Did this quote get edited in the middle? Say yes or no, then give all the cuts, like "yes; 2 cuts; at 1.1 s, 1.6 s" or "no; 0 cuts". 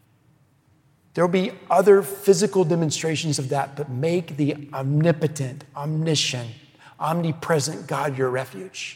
no; 0 cuts